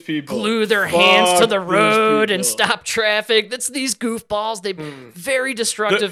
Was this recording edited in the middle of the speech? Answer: yes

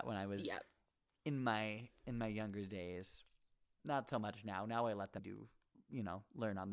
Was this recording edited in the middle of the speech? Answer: yes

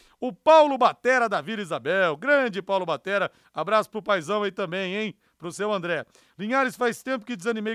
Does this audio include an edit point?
no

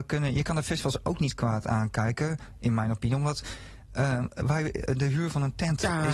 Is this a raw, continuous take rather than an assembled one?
yes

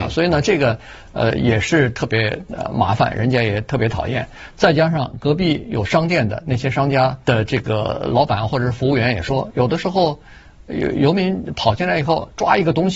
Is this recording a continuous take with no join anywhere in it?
no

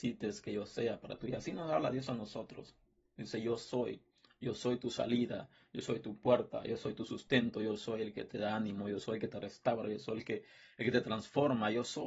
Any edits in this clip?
no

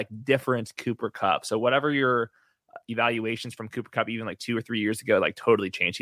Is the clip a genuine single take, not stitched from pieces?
yes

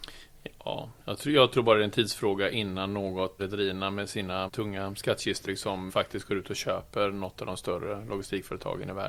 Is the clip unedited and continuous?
no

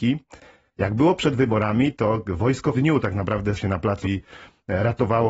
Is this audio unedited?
no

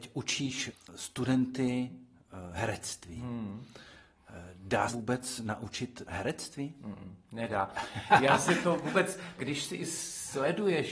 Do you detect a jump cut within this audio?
yes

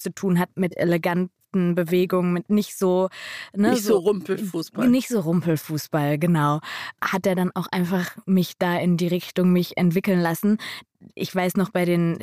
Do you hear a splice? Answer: no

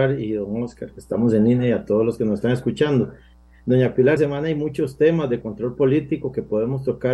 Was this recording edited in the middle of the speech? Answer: yes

